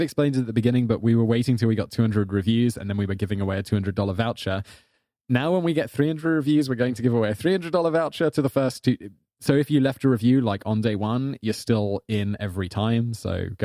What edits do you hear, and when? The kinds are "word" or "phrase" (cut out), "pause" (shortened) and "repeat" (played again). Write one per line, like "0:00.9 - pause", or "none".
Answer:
none